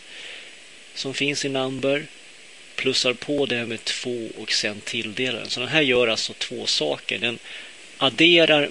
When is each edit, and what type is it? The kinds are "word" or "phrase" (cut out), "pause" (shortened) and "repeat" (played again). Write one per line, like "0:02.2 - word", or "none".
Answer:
none